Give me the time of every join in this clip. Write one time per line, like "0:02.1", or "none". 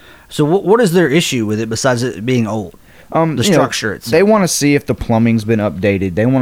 none